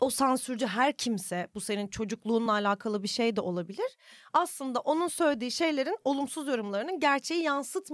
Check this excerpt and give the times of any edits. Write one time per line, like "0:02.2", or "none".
none